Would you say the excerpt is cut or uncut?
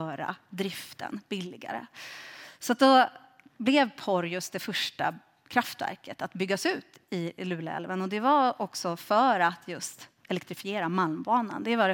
uncut